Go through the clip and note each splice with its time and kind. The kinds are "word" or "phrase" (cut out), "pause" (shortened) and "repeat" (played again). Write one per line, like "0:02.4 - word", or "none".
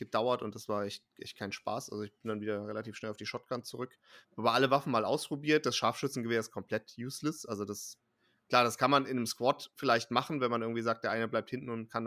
none